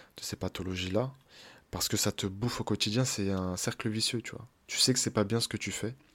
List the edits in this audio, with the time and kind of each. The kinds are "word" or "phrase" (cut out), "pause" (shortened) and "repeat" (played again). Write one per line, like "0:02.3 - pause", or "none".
none